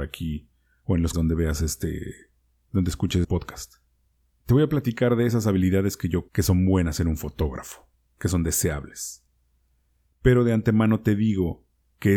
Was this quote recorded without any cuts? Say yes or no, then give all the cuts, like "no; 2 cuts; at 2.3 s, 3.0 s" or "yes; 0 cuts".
no; 3 cuts; at 1.1 s, 3.2 s, 6.3 s